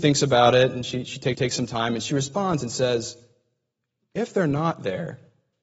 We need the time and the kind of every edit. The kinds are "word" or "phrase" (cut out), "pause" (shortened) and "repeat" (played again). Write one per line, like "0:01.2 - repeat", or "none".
0:01.3 - repeat